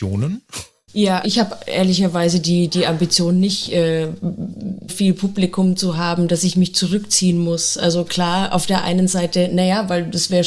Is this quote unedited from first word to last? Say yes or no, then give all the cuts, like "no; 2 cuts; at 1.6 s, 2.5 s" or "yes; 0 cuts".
no; 2 cuts; at 1.2 s, 4.9 s